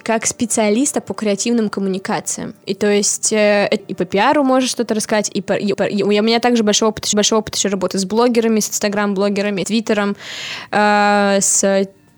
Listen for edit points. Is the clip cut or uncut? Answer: cut